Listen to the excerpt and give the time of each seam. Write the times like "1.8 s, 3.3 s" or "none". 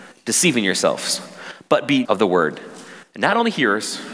2.0 s